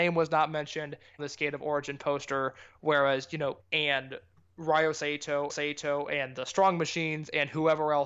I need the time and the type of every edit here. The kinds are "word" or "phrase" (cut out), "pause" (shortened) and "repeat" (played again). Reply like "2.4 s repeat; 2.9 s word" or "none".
1.2 s phrase; 3.6 s word; 5.5 s repeat